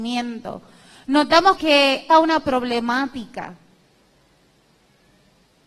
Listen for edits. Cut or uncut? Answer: cut